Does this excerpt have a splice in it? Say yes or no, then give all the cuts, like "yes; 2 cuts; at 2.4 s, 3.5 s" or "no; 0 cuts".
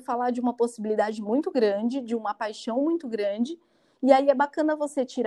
no; 0 cuts